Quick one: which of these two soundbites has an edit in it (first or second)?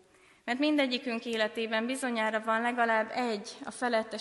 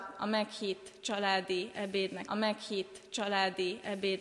second